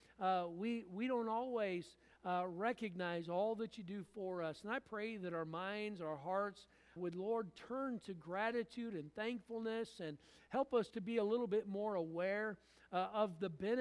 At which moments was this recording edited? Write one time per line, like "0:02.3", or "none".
0:07.0
0:10.9